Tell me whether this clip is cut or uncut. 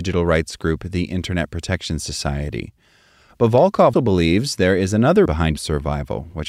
cut